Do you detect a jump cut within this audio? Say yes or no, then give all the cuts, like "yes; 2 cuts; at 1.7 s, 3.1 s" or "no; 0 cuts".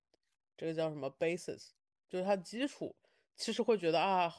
no; 0 cuts